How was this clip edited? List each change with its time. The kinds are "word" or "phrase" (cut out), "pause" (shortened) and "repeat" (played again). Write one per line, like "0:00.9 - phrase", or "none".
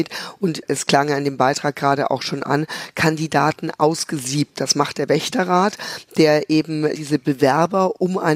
0:06.9 - word